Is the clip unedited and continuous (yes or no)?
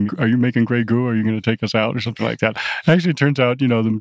yes